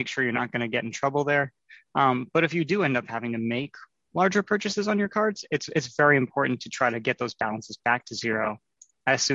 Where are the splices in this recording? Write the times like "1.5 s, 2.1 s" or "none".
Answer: none